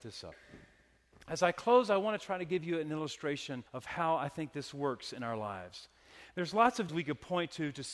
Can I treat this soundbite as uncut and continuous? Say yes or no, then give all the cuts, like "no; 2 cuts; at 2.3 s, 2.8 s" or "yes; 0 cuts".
no; 2 cuts; at 3.7 s, 6.9 s